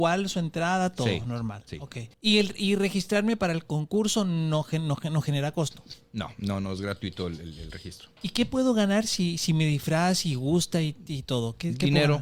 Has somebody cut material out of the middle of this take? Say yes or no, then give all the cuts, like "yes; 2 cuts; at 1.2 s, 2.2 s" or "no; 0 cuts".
yes; 1 cut; at 2.1 s